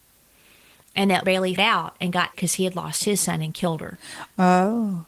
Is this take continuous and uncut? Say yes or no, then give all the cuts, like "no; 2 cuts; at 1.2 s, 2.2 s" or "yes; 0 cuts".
no; 3 cuts; at 1.2 s, 1.6 s, 2.3 s